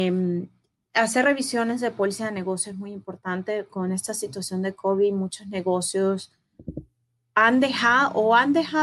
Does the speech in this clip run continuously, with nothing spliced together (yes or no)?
yes